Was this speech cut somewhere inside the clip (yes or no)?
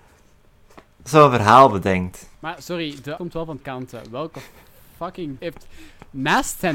yes